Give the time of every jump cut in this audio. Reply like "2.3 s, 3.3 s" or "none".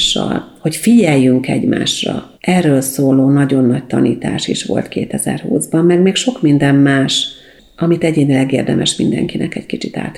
2.4 s